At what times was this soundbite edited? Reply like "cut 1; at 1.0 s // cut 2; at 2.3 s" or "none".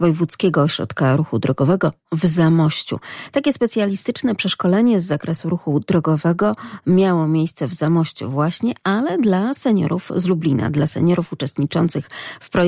none